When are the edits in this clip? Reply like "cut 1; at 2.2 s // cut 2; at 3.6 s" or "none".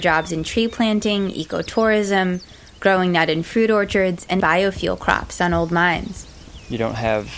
cut 1; at 4.4 s